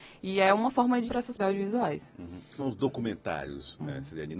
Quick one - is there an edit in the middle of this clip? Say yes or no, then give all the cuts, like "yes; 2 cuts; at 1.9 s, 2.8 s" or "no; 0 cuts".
yes; 3 cuts; at 1.1 s, 1.4 s, 2.6 s